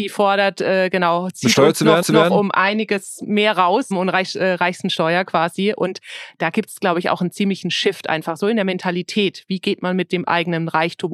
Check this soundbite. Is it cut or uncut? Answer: cut